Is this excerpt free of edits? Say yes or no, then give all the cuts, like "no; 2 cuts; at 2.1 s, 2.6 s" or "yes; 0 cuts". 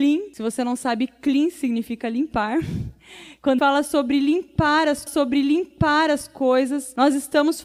no; 2 cuts; at 3.6 s, 5.1 s